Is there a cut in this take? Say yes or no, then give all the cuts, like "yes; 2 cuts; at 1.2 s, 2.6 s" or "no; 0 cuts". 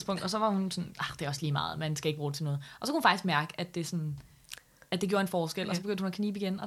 no; 0 cuts